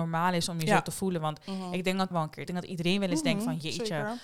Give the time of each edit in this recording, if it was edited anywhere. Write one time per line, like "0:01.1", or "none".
0:02.1
0:02.5